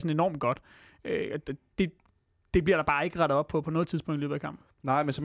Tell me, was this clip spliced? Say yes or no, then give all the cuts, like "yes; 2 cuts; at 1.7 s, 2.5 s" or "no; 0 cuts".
no; 0 cuts